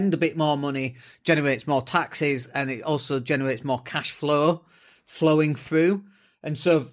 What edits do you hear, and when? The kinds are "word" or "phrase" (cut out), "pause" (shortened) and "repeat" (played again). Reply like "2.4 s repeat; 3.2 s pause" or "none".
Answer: none

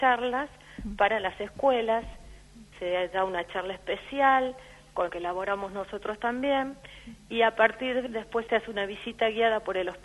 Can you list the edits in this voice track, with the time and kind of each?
2.7 s word; 5.1 s phrase; 8.1 s word

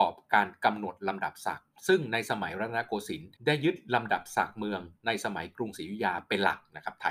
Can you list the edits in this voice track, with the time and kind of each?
1.8 s pause; 3.4 s pause

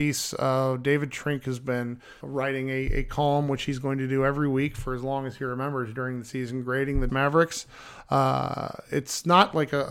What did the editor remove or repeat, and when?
2.2 s word; 7.1 s word

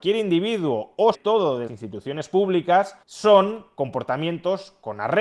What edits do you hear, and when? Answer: 1.1 s word; 1.7 s word; 3.0 s pause

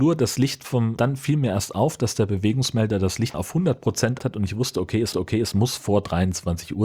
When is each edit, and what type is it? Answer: 1.0 s word; 3.3 s word; 4.2 s word; 5.1 s repeat

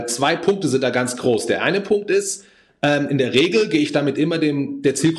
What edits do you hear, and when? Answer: none

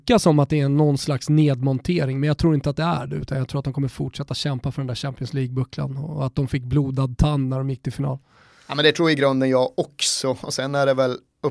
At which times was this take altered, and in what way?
none

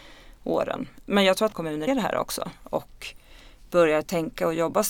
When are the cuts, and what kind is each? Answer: 1.5 s word; 1.9 s word

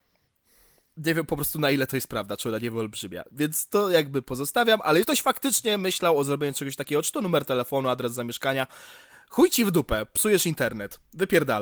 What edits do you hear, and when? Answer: 5.0 s word

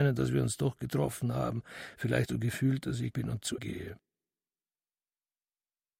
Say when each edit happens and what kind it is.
2.3 s word; 3.1 s word; 3.6 s word

